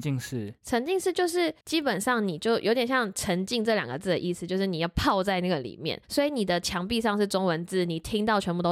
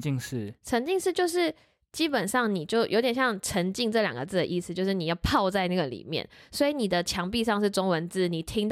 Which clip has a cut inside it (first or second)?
first